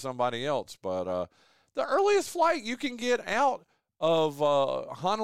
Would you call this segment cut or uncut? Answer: uncut